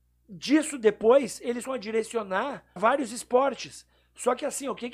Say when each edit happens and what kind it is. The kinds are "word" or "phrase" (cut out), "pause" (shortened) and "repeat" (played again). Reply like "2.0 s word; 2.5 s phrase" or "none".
1.7 s word; 2.8 s word